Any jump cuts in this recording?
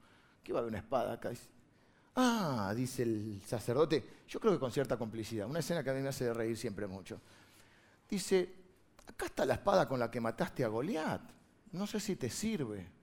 no; 0 cuts

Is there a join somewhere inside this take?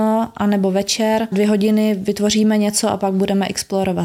yes; 1 cut; at 1.3 s

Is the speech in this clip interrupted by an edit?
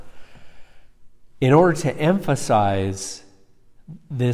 no; 0 cuts

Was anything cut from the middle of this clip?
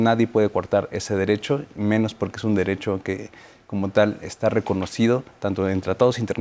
no; 0 cuts

